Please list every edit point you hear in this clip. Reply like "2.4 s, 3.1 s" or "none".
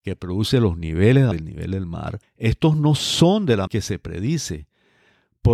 1.3 s, 2.2 s, 3.7 s